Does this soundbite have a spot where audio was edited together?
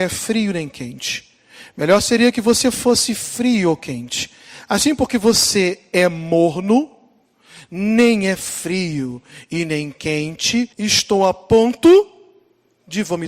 yes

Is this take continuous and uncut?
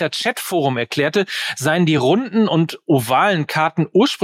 yes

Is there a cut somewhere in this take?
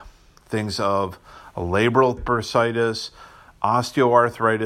yes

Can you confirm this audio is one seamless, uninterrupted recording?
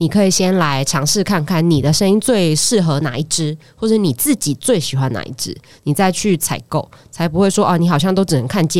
yes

